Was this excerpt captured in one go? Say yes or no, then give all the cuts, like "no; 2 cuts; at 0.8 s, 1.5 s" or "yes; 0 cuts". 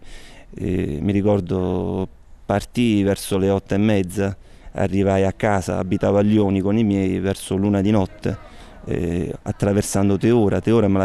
yes; 0 cuts